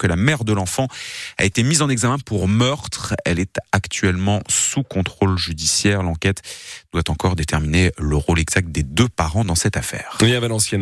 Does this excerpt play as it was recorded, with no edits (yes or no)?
yes